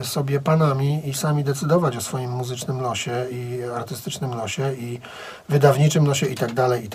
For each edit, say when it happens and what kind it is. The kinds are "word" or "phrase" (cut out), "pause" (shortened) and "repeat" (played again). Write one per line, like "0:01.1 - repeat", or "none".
none